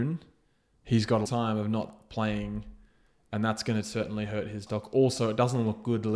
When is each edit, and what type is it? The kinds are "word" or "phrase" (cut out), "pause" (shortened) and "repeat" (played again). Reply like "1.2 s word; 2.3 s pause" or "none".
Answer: 1.3 s word; 4.7 s word